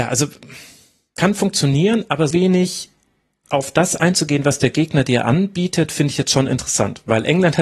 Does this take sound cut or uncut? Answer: cut